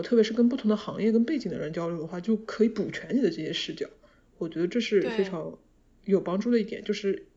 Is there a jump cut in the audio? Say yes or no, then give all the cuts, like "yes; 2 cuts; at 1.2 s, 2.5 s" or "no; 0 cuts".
no; 0 cuts